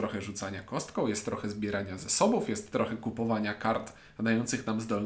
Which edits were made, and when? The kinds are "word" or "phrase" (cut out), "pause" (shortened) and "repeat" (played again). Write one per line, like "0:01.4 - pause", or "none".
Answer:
none